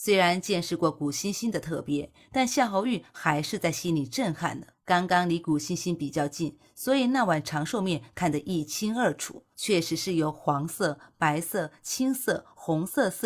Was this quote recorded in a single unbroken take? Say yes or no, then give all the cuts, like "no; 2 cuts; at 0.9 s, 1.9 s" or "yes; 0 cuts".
no; 2 cuts; at 4.7 s, 9.5 s